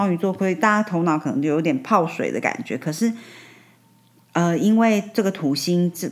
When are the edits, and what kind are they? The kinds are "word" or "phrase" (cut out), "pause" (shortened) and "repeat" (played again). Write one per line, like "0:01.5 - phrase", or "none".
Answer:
none